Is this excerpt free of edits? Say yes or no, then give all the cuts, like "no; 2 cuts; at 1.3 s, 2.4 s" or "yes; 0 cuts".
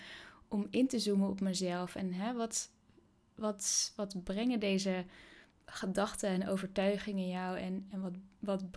no; 1 cut; at 5.5 s